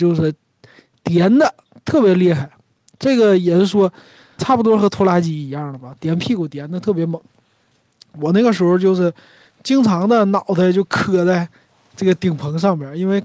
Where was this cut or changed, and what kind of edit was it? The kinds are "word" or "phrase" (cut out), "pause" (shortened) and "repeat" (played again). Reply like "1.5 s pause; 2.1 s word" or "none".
4.4 s word